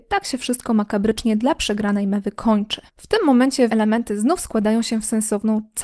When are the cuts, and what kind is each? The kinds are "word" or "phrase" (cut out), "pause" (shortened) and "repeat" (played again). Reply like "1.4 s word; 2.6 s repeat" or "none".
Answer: 2.9 s pause; 3.7 s phrase